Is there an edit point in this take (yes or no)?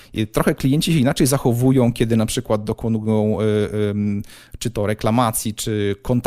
no